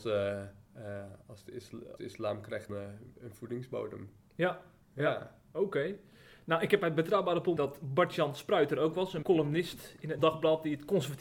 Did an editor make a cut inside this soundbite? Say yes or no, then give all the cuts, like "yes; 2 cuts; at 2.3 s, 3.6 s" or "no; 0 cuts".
yes; 5 cuts; at 2.0 s, 2.7 s, 7.6 s, 9.2 s, 10.2 s